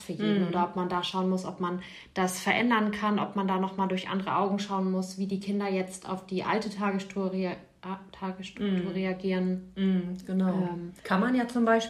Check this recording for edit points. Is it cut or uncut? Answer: cut